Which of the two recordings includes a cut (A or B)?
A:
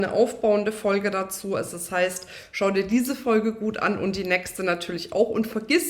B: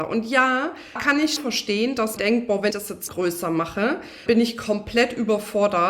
B